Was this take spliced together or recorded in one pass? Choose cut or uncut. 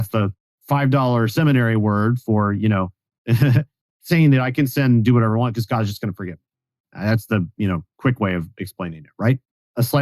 uncut